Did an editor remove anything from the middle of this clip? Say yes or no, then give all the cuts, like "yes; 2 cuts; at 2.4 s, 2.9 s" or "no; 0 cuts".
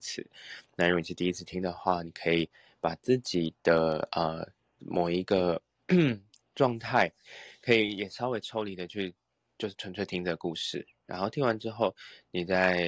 no; 0 cuts